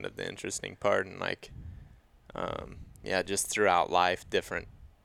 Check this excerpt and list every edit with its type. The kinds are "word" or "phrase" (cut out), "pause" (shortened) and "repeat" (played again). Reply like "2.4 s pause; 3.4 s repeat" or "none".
3.0 s pause